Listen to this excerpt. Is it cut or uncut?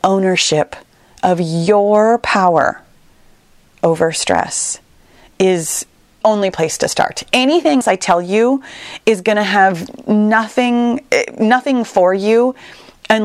cut